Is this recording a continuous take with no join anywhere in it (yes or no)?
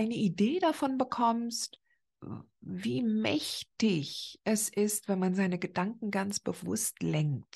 yes